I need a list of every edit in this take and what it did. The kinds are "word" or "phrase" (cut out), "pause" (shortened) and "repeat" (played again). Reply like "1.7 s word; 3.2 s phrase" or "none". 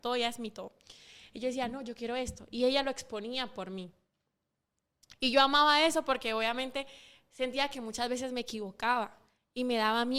none